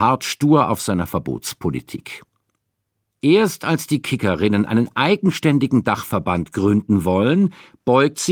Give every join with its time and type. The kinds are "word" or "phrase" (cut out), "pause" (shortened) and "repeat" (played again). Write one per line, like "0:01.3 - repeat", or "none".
none